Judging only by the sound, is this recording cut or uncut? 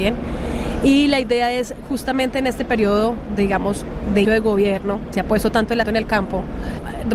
cut